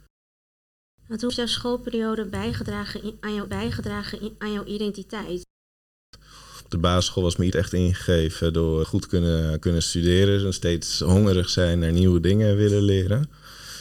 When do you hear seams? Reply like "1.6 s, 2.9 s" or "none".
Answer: 1.3 s, 3.5 s, 7.5 s, 8.8 s